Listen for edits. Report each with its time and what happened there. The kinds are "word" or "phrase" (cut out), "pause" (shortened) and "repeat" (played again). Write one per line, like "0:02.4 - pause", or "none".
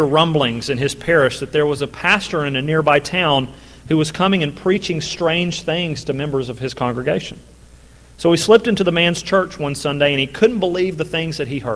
none